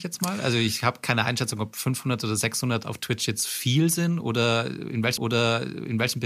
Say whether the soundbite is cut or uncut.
cut